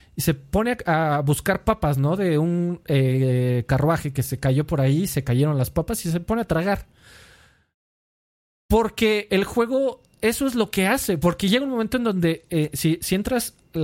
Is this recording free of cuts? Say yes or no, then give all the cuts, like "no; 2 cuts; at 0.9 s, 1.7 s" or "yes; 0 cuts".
yes; 0 cuts